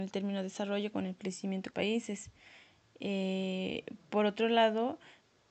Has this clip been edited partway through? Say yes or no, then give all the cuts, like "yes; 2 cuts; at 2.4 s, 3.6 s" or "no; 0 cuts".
yes; 1 cut; at 1.7 s